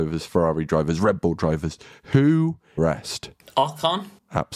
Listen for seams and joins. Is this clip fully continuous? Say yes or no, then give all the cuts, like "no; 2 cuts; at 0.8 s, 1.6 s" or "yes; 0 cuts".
no; 1 cut; at 2.8 s